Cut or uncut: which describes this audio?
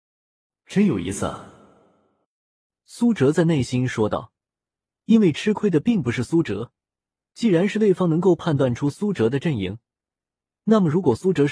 uncut